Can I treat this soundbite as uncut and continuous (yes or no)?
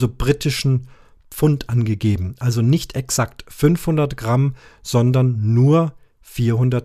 yes